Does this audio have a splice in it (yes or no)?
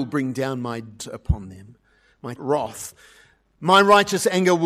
yes